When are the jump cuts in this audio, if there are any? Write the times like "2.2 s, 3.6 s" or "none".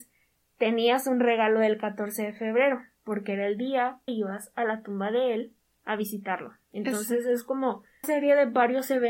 4.1 s, 8.0 s